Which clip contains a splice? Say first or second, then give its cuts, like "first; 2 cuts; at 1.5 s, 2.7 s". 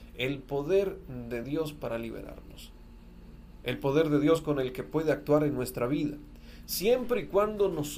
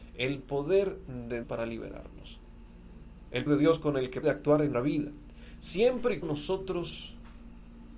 second; 5 cuts; at 1.4 s, 3.5 s, 4.2 s, 4.7 s, 6.2 s